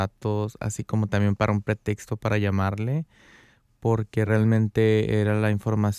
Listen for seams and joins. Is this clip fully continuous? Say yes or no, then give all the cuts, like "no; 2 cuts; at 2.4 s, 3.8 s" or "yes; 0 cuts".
yes; 0 cuts